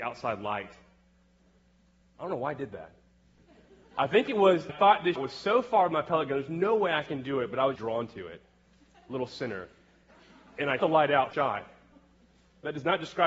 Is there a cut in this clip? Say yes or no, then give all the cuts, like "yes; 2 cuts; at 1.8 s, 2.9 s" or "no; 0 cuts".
yes; 5 cuts; at 4.7 s, 5.2 s, 7.8 s, 10.8 s, 11.3 s